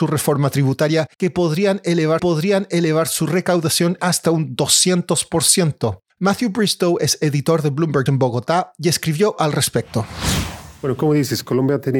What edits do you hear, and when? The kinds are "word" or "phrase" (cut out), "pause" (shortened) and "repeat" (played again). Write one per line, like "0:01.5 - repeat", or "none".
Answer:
0:01.1 - pause
0:02.2 - repeat
0:04.0 - word
0:06.1 - pause
0:08.1 - word
0:09.4 - phrase